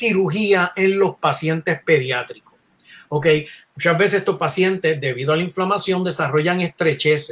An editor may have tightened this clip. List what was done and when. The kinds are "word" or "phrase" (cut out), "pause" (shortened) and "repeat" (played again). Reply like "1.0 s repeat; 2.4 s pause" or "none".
none